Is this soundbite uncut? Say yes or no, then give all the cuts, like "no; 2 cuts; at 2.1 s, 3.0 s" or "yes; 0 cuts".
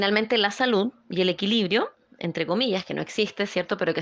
yes; 0 cuts